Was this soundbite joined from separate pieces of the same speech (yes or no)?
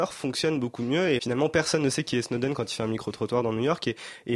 yes